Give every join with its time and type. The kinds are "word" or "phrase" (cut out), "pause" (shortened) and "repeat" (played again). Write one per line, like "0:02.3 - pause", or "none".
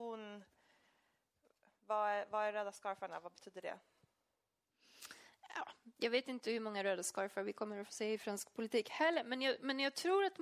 none